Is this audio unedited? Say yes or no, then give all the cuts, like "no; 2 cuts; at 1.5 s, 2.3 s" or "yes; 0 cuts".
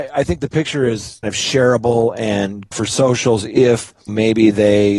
no; 3 cuts; at 1.2 s, 2.7 s, 4.1 s